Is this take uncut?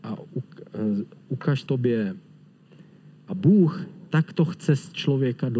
no; 1 cut; at 1.7 s

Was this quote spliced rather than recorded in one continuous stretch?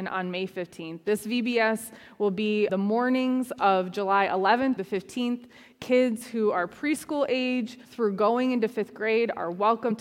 yes; 3 cuts; at 2.7 s, 4.8 s, 7.8 s

